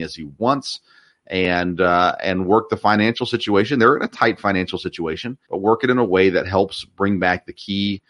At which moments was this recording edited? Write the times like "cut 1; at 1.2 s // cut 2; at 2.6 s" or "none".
cut 1; at 5.4 s